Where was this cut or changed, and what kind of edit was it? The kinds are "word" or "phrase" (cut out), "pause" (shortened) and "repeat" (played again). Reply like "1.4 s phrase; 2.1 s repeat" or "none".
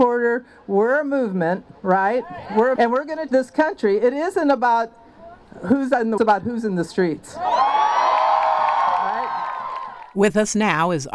2.8 s word; 3.3 s word; 6.2 s phrase